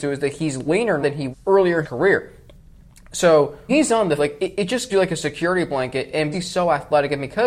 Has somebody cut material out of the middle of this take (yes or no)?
yes